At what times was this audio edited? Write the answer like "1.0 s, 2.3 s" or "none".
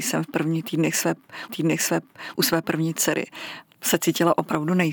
1.5 s